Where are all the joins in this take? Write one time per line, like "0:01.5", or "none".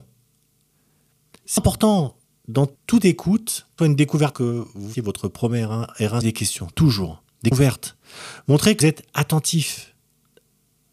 0:01.6
0:02.8
0:03.8
0:04.3
0:04.9
0:06.2
0:07.5
0:08.8